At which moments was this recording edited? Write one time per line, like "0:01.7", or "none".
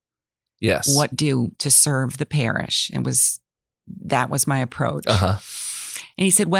0:01.1
0:04.0